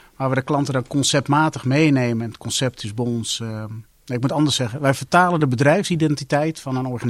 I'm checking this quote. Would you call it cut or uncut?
uncut